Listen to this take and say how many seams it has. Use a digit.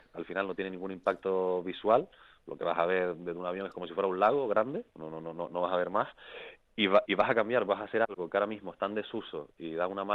3